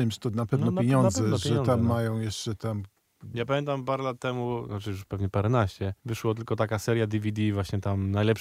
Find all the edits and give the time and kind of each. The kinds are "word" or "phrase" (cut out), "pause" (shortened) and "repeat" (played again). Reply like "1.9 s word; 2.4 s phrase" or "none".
6.0 s pause